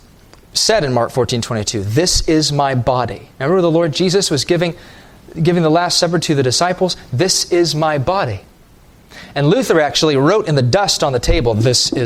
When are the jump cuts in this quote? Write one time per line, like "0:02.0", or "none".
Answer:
0:03.3